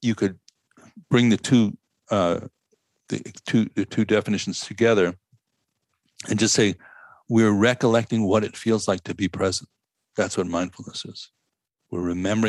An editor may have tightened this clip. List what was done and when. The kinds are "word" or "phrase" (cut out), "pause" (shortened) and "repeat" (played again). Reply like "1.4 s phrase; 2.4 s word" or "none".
none